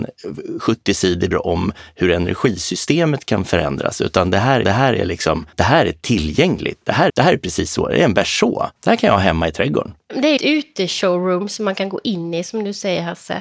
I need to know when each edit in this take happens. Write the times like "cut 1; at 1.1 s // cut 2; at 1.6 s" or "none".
cut 1; at 1.3 s // cut 2; at 4.6 s // cut 3; at 5.5 s // cut 4; at 7.1 s // cut 5; at 8.8 s // cut 6; at 10.4 s